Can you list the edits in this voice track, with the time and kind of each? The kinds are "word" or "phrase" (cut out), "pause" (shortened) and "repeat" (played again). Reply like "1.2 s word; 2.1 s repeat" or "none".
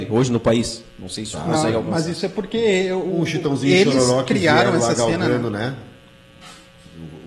1.3 s word